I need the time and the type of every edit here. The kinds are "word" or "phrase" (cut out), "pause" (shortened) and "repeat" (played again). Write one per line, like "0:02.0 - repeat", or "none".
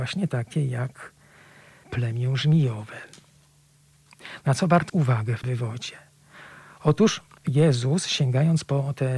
0:01.8 - word
0:04.9 - word
0:05.4 - word